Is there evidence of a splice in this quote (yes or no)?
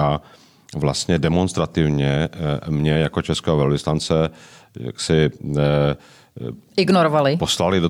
no